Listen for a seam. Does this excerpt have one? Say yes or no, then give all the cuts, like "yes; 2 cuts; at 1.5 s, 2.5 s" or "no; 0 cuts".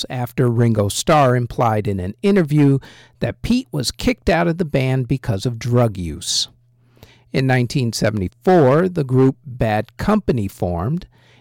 no; 0 cuts